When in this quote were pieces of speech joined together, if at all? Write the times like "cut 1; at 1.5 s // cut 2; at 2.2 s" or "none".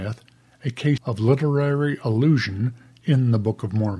cut 1; at 1.0 s

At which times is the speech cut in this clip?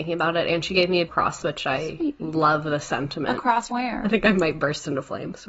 cut 1; at 1.1 s // cut 2; at 1.4 s // cut 3; at 2.2 s // cut 4; at 3.7 s

